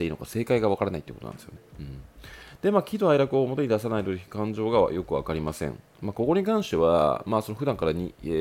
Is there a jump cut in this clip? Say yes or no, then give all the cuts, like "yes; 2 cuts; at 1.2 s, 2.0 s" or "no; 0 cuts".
yes; 1 cut; at 1.7 s